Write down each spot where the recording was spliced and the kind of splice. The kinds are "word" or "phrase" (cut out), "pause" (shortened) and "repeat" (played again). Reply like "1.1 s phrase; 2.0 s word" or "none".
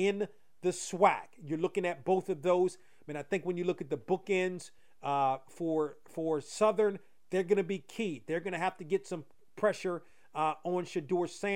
none